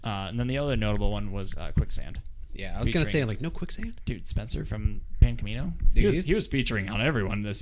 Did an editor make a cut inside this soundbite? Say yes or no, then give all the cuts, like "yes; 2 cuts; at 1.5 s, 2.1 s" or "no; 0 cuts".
no; 0 cuts